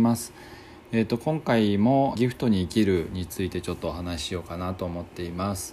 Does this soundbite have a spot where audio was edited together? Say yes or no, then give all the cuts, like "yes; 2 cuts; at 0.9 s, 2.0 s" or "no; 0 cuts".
yes; 1 cut; at 2.1 s